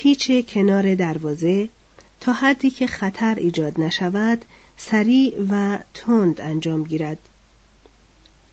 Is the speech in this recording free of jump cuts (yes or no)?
yes